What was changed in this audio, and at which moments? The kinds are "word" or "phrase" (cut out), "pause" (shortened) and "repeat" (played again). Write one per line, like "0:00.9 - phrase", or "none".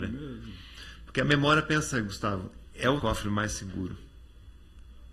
0:03.0 - word